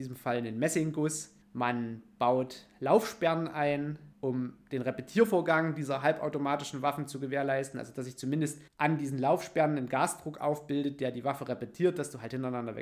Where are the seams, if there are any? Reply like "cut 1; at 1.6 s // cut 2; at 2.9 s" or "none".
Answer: cut 1; at 1.4 s // cut 2; at 4.1 s // cut 3; at 8.7 s

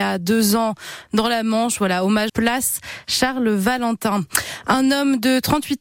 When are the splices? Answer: cut 1; at 2.3 s

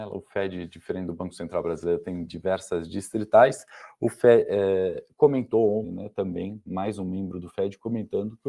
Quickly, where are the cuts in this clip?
cut 1; at 5.8 s

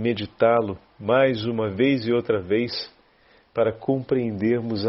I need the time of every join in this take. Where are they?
none

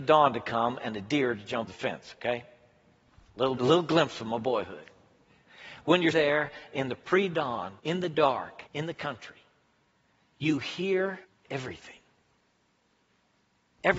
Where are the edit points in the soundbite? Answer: cut 1; at 1.7 s // cut 2; at 3.6 s // cut 3; at 6.1 s // cut 4; at 7.8 s // cut 5; at 8.7 s // cut 6; at 11.2 s

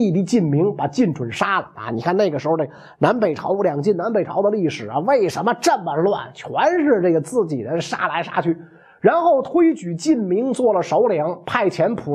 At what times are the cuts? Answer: none

